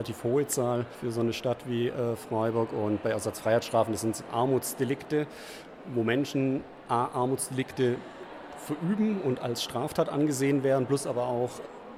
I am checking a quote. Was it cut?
yes; 1 cut; at 4.3 s

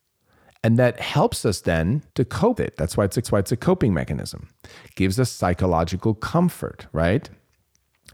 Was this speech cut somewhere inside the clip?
yes; 3 cuts; at 2.1 s, 2.6 s, 3.2 s

